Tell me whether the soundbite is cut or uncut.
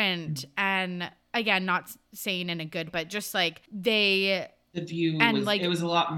cut